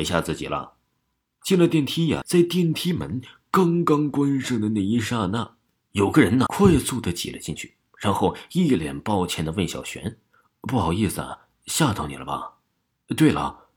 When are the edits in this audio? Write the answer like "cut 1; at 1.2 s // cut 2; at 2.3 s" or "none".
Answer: cut 1; at 2.2 s // cut 2; at 6.5 s